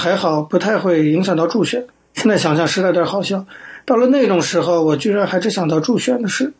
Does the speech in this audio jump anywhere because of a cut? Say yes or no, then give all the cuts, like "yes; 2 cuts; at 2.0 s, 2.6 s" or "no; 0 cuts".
yes; 1 cut; at 1.9 s